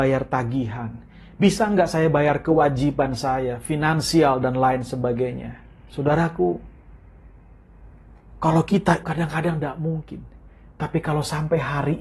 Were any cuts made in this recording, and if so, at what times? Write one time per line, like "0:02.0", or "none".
0:05.6
0:09.0